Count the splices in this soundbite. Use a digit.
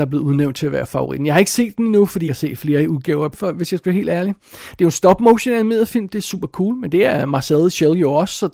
2